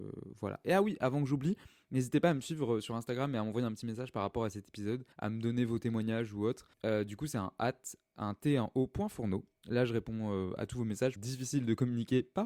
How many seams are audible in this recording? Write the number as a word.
three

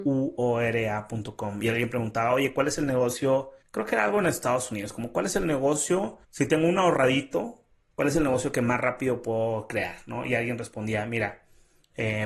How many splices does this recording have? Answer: two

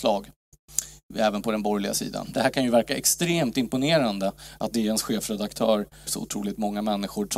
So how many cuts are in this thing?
one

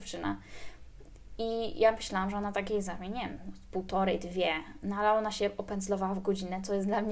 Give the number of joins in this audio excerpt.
zero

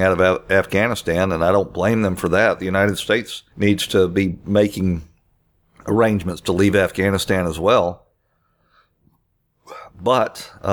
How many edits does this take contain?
one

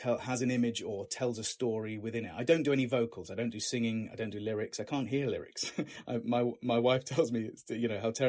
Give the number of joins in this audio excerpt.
zero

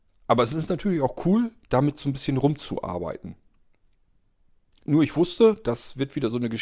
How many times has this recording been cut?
zero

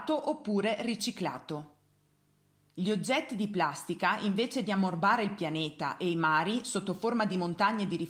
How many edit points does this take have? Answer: zero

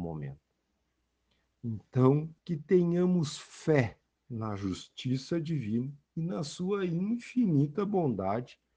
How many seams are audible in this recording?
two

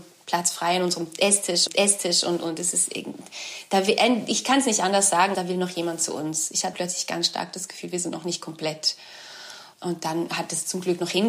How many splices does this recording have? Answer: three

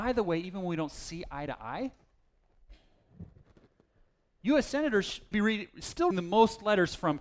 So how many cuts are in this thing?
two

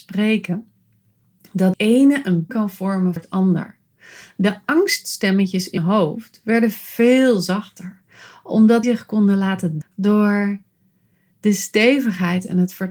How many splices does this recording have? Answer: six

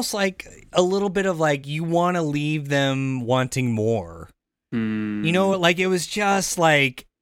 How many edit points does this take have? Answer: zero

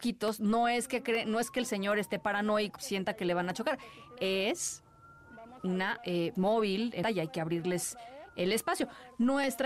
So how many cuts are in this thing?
four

